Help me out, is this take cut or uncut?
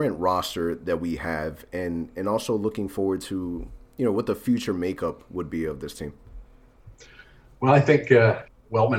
uncut